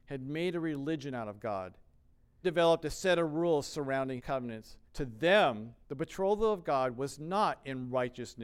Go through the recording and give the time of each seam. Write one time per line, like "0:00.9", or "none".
0:02.4
0:04.2
0:04.9
0:05.8